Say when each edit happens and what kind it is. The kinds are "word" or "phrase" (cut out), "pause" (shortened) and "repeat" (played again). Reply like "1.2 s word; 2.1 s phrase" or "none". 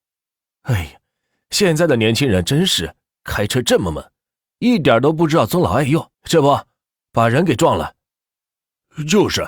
6.1 s pause